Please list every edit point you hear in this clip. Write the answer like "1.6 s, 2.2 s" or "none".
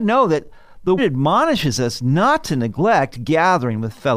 1.0 s